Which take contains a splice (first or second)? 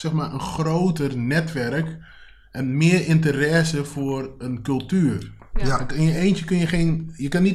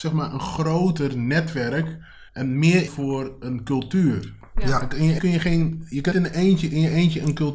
second